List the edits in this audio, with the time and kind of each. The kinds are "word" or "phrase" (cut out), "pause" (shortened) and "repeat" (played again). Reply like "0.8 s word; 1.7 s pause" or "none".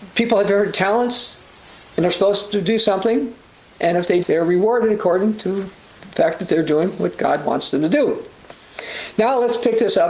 4.2 s word